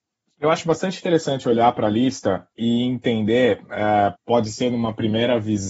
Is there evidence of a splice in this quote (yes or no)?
yes